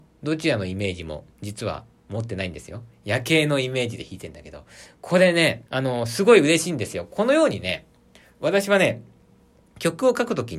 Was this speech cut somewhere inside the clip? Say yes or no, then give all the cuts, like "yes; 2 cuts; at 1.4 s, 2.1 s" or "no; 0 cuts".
yes; 2 cuts; at 1.3 s, 5.7 s